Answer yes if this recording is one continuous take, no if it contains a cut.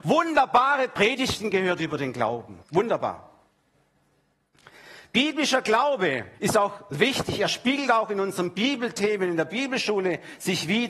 no